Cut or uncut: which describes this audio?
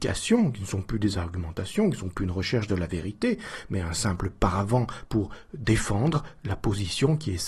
uncut